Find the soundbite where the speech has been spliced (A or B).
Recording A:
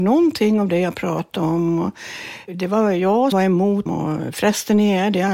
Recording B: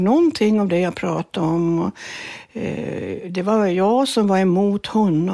A